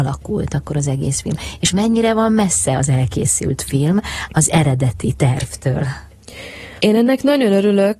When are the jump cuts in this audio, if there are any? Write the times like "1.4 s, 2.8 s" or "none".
6.8 s